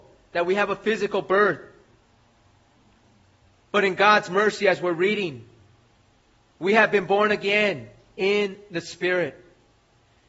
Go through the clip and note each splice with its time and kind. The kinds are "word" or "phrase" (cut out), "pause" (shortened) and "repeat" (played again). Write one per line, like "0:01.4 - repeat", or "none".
none